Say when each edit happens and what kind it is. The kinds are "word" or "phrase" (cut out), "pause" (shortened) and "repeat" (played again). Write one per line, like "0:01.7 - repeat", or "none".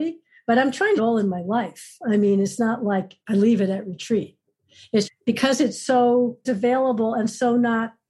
0:01.0 - phrase
0:03.2 - pause
0:05.0 - word
0:06.4 - word